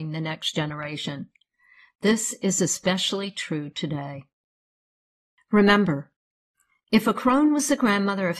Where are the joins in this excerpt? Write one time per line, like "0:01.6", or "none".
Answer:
none